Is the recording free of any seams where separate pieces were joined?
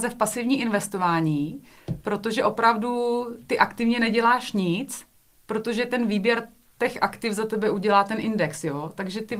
yes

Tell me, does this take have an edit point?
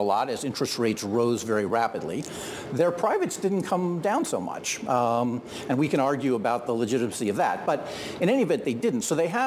no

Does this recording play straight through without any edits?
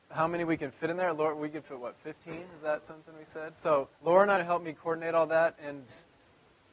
no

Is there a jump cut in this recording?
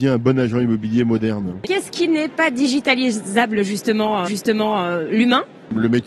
yes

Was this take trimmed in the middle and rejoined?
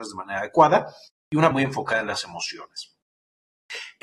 yes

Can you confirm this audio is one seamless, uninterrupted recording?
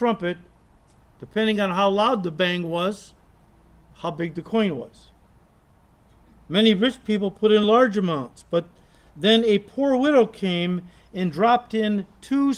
yes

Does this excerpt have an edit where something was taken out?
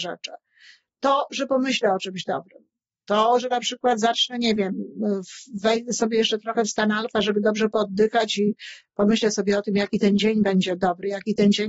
no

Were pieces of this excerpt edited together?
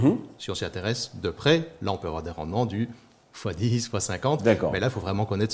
no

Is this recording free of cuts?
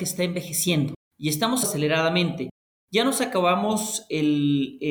no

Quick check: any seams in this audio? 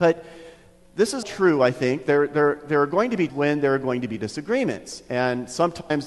yes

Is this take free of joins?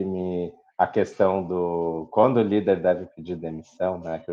yes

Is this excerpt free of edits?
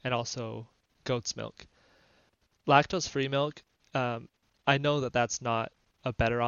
yes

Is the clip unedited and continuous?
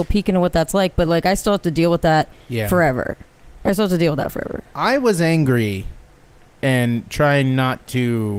yes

